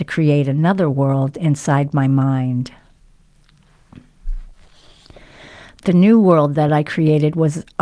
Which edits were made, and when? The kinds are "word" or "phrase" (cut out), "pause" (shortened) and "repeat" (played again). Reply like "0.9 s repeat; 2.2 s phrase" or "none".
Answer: none